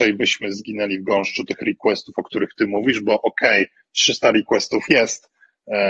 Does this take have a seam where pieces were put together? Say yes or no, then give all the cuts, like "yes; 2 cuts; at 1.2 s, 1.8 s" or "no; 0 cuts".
no; 0 cuts